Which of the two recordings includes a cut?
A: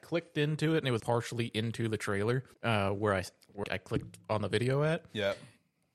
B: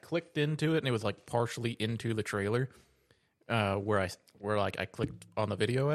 A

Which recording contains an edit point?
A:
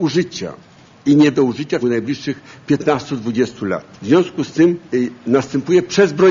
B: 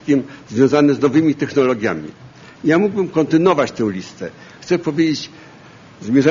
A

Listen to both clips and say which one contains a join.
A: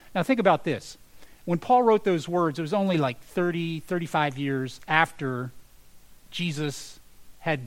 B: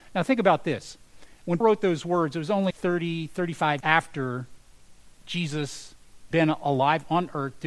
B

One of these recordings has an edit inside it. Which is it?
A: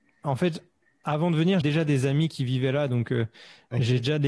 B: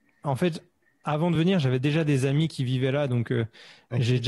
A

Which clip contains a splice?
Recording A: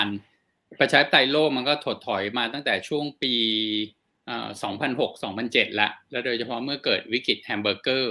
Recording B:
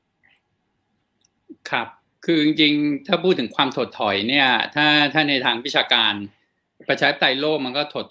B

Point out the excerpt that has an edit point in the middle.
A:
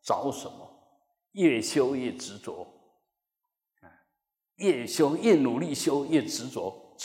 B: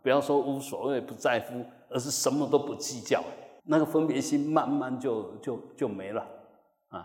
B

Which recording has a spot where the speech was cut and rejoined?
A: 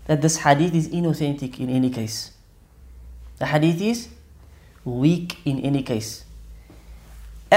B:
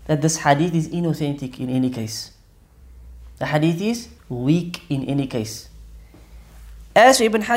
B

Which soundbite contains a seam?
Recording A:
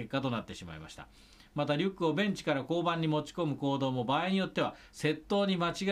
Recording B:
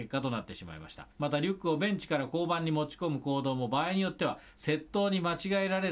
B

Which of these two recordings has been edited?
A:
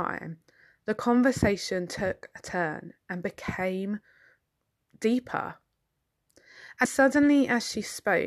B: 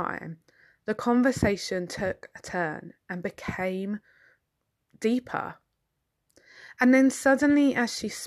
A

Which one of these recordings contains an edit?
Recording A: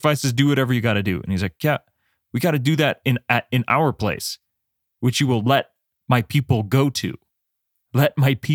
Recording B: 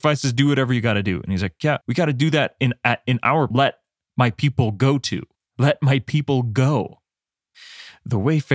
B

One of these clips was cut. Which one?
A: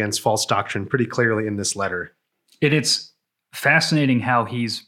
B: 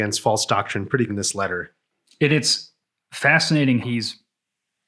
B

